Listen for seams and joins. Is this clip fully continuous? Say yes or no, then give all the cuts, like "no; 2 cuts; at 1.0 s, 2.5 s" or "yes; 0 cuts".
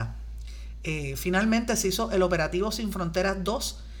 yes; 0 cuts